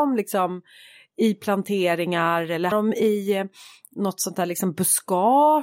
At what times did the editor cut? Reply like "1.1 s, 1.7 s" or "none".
2.7 s